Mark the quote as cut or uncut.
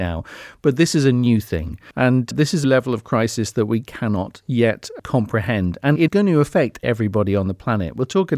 cut